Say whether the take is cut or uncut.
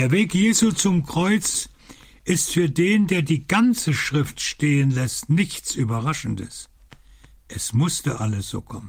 uncut